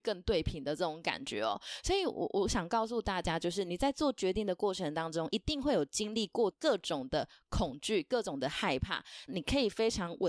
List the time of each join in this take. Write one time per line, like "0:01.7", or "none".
0:09.3